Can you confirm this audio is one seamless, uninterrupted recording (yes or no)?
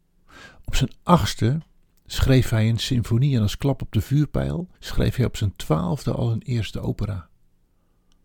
no